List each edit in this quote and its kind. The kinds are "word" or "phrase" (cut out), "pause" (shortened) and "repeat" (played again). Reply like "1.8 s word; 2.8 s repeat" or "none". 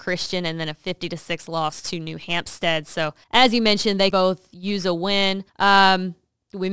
3.2 s pause; 4.1 s word; 5.5 s pause